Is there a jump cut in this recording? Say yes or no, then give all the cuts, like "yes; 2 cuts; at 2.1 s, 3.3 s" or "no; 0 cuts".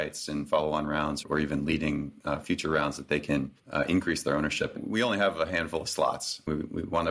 yes; 2 cuts; at 1.2 s, 3.6 s